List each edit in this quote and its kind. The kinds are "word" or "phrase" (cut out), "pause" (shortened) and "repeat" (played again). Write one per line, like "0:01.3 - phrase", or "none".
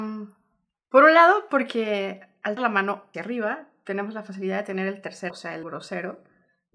0:02.6 - word
0:03.1 - word
0:05.3 - word
0:05.6 - word